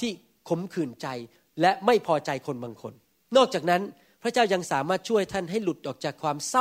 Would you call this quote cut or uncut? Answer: uncut